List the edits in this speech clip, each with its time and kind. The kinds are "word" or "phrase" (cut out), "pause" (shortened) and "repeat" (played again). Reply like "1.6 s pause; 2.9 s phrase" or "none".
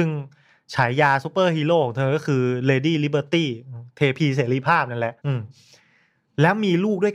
5.2 s pause